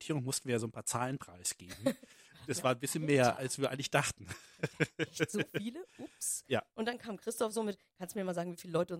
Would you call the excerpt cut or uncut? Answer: uncut